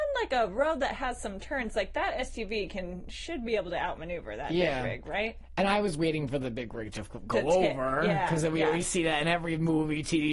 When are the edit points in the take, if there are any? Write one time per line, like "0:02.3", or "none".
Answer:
none